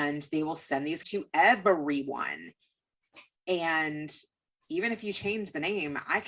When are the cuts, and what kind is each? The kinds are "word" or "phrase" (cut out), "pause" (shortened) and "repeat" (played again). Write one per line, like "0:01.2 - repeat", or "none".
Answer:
0:01.0 - word
0:03.4 - pause